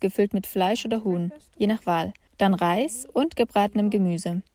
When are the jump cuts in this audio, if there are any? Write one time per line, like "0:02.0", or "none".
none